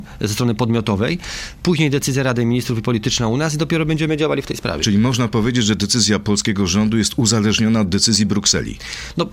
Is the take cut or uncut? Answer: uncut